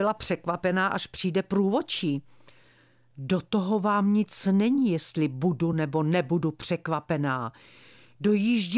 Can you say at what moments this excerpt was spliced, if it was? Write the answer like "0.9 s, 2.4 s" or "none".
none